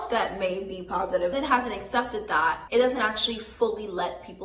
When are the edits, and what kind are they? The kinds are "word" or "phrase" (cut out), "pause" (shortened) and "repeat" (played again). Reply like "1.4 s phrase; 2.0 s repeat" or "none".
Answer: 1.3 s phrase; 2.7 s word